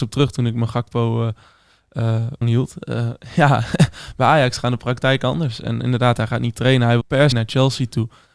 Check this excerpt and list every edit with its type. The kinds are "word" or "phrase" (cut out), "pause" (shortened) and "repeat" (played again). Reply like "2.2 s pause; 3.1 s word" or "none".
2.4 s word; 7.0 s word; 7.3 s word